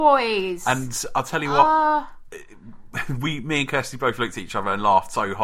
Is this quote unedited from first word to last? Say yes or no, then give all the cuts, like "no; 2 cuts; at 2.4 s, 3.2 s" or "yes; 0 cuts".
yes; 0 cuts